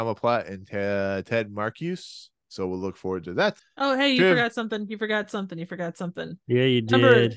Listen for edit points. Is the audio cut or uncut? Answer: uncut